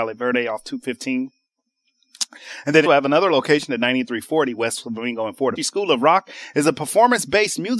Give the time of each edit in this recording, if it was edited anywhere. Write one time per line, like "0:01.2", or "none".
0:02.8
0:05.6